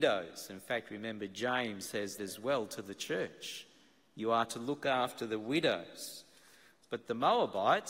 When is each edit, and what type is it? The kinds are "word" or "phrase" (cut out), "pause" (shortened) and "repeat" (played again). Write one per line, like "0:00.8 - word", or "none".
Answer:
0:02.2 - word